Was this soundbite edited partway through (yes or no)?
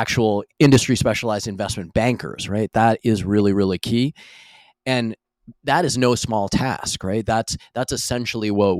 no